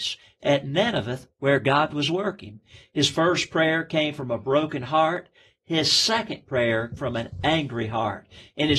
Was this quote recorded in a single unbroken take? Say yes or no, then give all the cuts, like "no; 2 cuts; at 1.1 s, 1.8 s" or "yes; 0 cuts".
no; 1 cut; at 7.0 s